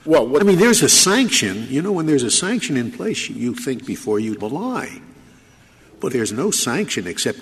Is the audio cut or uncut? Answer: cut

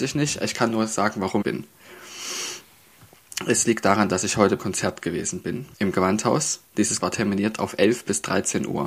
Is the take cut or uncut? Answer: cut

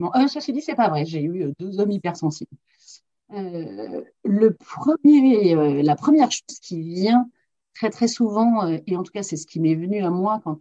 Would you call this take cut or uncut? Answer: uncut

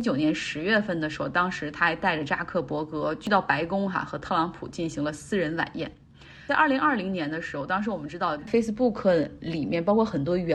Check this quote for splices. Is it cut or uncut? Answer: cut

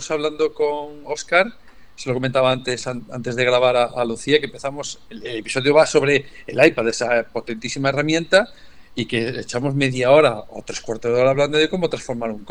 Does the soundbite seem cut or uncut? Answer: uncut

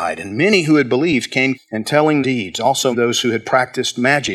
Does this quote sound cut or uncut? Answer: cut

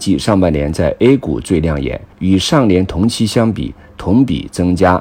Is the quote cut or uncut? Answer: cut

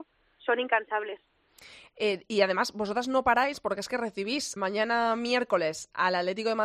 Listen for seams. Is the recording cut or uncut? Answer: cut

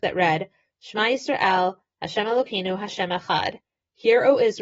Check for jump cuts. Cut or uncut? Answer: uncut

